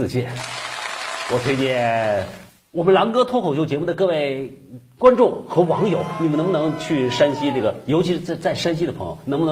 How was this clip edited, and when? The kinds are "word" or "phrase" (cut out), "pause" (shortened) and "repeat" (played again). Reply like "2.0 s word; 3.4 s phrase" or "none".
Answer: 2.5 s pause